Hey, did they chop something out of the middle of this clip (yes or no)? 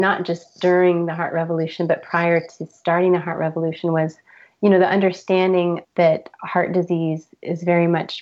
yes